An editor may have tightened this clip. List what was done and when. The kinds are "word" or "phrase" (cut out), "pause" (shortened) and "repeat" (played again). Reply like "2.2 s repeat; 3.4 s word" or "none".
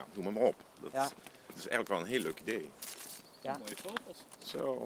1.5 s phrase